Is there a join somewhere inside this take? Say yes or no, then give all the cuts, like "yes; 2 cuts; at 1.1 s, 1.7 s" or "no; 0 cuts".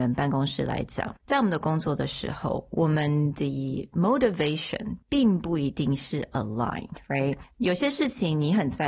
yes; 2 cuts; at 1.2 s, 5.0 s